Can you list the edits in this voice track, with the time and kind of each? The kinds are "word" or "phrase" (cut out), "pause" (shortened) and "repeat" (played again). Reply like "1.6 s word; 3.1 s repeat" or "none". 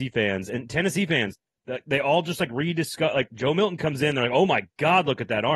none